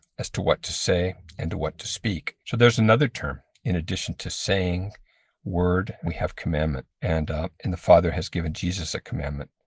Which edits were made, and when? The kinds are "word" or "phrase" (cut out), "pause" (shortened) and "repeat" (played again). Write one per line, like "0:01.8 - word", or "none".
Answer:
0:02.4 - pause
0:06.0 - word
0:06.9 - pause
0:07.5 - pause